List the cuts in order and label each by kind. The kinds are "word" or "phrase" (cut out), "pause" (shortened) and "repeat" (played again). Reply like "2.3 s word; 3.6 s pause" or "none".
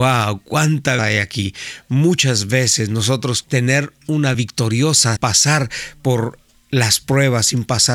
1.0 s word; 3.4 s word; 4.3 s word; 5.2 s word

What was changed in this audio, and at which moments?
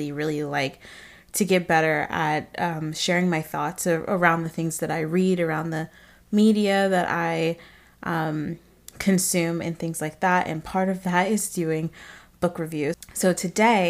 none

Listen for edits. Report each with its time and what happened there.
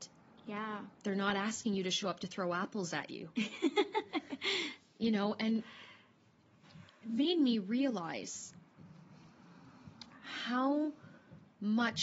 0.9 s pause

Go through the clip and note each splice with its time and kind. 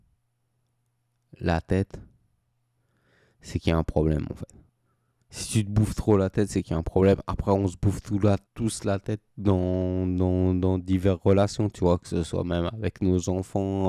4.7 s pause; 8.5 s pause; 9.3 s pause

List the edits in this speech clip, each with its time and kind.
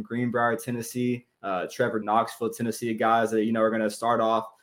1.3 s pause; 2.0 s phrase

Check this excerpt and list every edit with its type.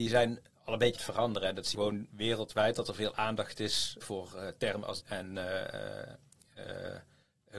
0.9 s word; 1.7 s word; 4.0 s word; 5.0 s word

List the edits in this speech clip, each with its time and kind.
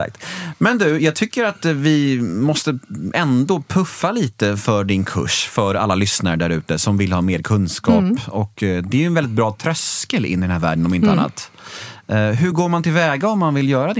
none

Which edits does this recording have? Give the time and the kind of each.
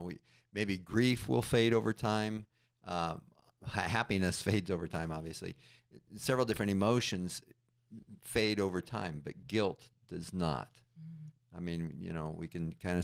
none

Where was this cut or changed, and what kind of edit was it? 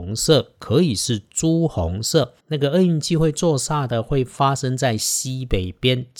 2.4 s pause

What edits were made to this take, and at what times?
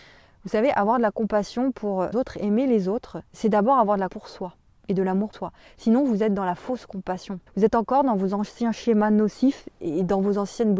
2.1 s word; 3.3 s pause; 4.1 s word; 4.6 s pause; 5.3 s word; 7.5 s pause

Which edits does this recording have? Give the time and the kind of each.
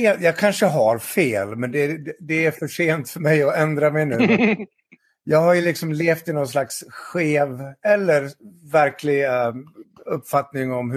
none

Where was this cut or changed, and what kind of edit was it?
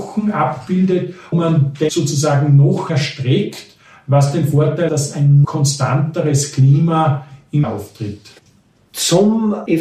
1.3 s word; 1.9 s word; 2.9 s word; 4.9 s word; 5.4 s word; 7.6 s word

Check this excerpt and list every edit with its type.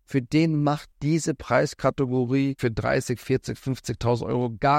0.9 s word; 2.6 s word

